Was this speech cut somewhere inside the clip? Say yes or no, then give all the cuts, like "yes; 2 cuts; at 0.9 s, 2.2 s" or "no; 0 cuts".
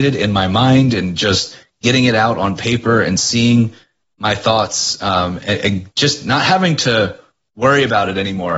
no; 0 cuts